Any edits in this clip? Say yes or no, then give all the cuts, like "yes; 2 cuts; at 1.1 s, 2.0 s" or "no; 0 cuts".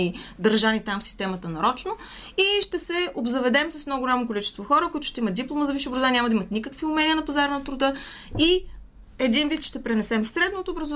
no; 0 cuts